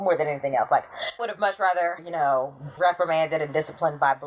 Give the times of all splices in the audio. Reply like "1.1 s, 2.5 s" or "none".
1.2 s, 2.0 s, 2.8 s